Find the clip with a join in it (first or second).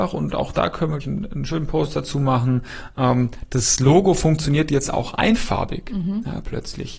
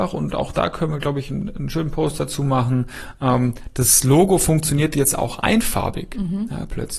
first